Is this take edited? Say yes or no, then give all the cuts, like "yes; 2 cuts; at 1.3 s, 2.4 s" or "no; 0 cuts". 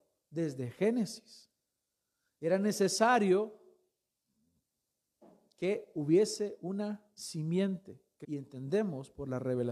yes; 1 cut; at 8.2 s